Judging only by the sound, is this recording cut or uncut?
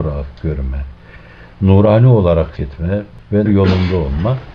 cut